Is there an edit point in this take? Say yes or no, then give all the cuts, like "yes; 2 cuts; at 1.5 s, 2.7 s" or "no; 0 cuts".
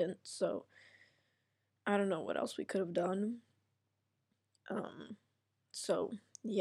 no; 0 cuts